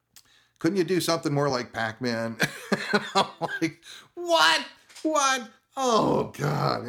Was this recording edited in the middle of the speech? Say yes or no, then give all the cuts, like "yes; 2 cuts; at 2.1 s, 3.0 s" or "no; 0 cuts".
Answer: no; 0 cuts